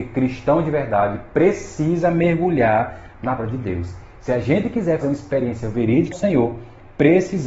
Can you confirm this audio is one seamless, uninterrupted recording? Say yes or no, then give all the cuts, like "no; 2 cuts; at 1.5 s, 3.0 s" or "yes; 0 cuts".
no; 3 cuts; at 3.4 s, 5.0 s, 6.1 s